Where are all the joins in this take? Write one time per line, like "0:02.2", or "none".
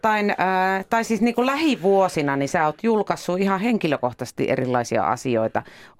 none